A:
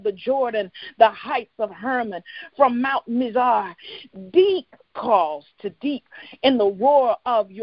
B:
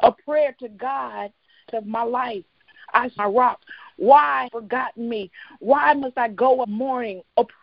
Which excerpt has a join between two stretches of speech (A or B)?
B